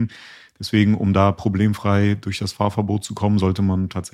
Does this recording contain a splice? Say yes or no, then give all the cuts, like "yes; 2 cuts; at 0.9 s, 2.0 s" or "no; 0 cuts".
no; 0 cuts